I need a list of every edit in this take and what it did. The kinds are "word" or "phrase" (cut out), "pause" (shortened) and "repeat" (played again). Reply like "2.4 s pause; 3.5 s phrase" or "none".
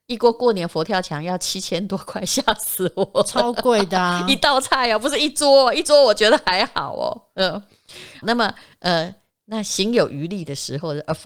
8.2 s word